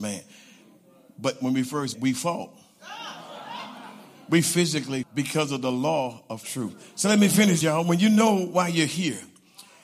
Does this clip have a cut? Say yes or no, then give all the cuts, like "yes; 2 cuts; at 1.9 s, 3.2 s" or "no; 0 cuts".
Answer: yes; 4 cuts; at 1.9 s, 5.0 s, 6.4 s, 7.6 s